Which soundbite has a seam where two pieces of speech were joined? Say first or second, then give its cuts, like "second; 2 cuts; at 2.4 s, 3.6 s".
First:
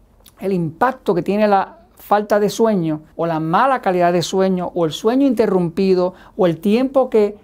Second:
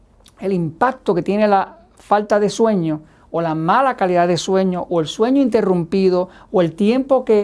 first; 1 cut; at 3.1 s